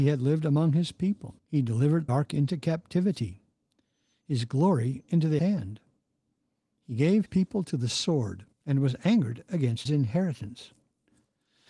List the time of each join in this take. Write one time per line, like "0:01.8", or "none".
0:01.4
0:02.1
0:05.4
0:07.3
0:08.5
0:09.9